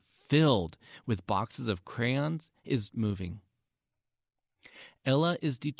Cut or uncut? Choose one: cut